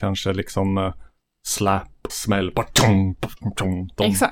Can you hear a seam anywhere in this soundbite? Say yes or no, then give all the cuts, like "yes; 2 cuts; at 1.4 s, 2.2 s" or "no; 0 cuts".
yes; 1 cut; at 2.1 s